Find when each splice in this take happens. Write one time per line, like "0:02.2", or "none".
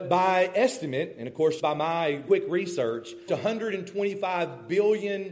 0:01.6
0:02.3
0:03.3